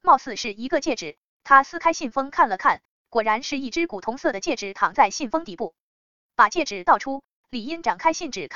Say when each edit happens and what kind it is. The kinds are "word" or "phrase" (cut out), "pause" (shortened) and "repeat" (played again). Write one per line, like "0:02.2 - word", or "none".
none